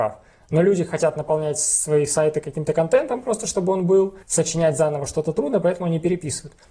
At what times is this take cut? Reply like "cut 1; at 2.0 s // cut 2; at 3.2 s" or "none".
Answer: cut 1; at 4.2 s